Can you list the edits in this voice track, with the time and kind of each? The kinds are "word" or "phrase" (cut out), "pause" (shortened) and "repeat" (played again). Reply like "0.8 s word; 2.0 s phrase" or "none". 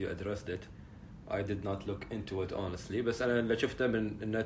none